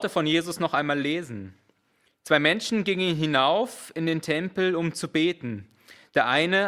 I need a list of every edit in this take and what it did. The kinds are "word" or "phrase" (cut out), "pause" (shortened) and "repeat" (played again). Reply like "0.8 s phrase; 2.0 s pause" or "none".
none